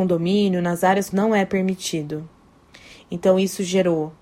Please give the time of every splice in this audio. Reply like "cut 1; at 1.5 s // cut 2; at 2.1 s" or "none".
cut 1; at 1.1 s